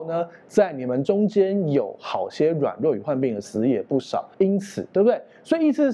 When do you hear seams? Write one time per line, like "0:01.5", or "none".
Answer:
0:04.3